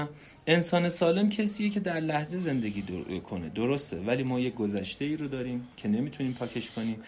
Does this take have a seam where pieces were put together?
no; 0 cuts

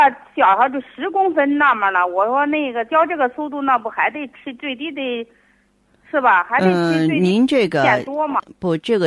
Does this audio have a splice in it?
no; 0 cuts

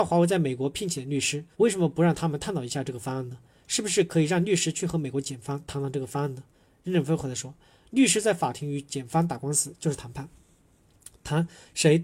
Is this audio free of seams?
no; 2 cuts; at 1.5 s, 6.5 s

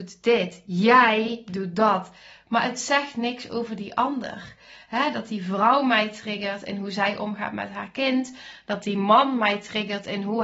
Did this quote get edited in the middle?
no; 0 cuts

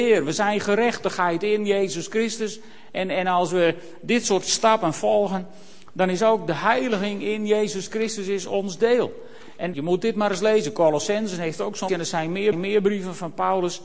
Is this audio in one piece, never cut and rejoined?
no; 3 cuts; at 9.7 s, 11.9 s, 12.5 s

